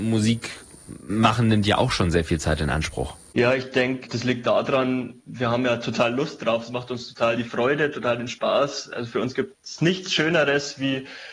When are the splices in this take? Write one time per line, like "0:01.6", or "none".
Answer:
none